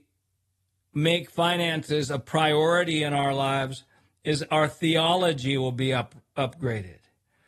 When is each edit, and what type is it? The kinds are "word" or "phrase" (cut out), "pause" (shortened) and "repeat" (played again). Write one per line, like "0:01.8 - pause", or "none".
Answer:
none

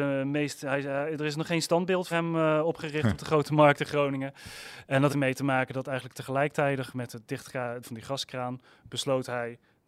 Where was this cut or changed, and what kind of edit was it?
0:02.1 - word
0:05.1 - word
0:07.8 - word

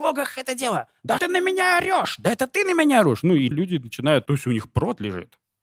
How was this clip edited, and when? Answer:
0:01.2 - word
0:03.5 - word
0:04.3 - word

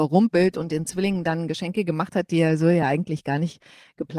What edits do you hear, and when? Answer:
none

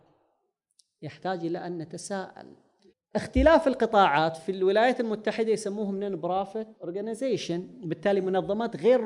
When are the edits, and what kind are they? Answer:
0:02.9 - pause
0:06.7 - pause

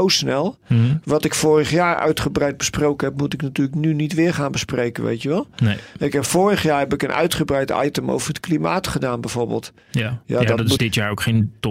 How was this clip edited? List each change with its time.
0:10.8 - word

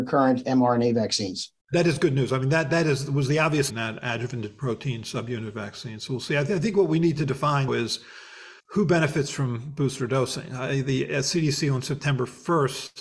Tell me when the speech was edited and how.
0:01.6 - pause
0:03.7 - phrase
0:07.7 - word
0:08.6 - pause

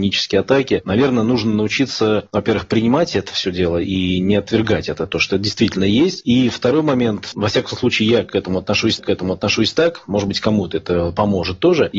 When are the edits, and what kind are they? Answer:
0:07.3 - word
0:09.0 - repeat

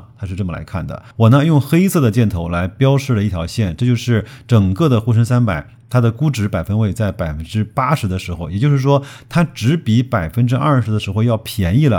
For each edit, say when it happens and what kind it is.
none

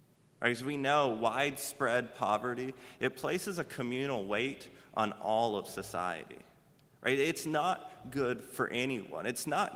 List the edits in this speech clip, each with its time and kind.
none

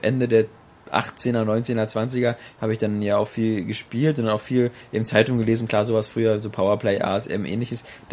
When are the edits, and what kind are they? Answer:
none

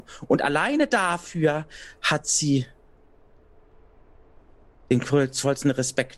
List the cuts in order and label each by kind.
none

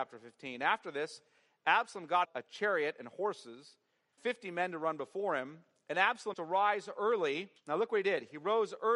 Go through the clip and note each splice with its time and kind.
0:02.2 - word
0:04.2 - word
0:06.3 - word

